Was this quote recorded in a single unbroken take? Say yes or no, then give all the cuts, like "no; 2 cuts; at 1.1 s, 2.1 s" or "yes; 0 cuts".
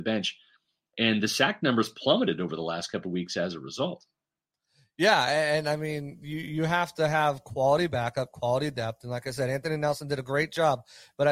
yes; 0 cuts